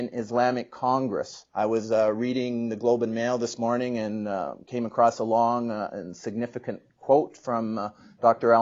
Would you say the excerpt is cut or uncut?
cut